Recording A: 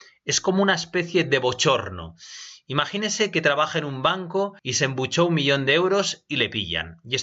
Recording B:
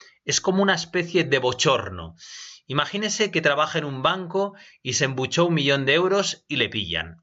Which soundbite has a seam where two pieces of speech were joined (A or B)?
A